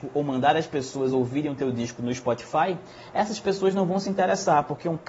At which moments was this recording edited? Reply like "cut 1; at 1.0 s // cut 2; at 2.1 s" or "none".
none